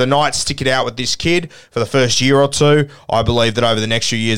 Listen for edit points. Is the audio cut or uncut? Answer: uncut